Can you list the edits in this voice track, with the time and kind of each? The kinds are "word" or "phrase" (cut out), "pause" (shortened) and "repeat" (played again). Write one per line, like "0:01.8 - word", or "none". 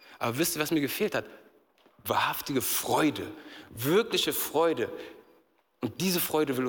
none